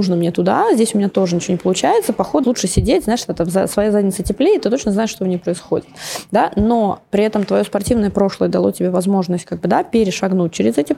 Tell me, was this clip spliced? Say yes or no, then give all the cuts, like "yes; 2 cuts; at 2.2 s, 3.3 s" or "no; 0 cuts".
yes; 1 cut; at 2.4 s